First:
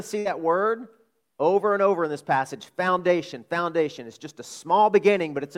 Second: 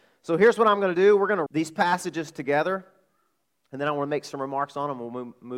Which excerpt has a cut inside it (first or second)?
second